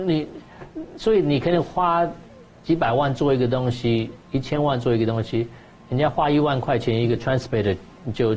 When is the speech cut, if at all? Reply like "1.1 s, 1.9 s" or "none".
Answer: none